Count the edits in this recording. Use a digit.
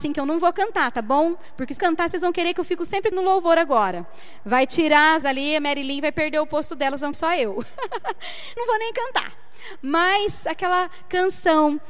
5